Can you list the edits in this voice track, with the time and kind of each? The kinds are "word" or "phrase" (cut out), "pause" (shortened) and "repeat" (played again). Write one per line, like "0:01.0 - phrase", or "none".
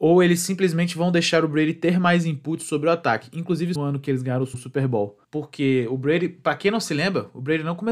0:03.8 - phrase
0:04.5 - word
0:05.2 - pause